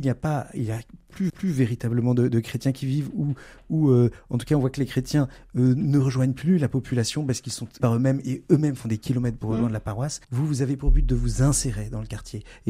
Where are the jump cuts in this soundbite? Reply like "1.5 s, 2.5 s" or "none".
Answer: 1.3 s, 7.8 s, 10.2 s

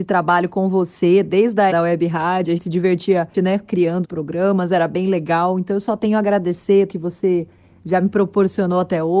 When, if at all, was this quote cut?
1.7 s, 2.6 s, 3.3 s, 4.0 s, 6.9 s

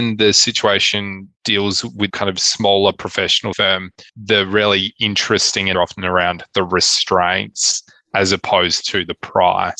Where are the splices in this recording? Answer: 1.3 s, 2.1 s, 3.5 s, 4.1 s, 5.7 s

